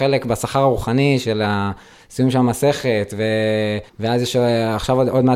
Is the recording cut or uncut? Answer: cut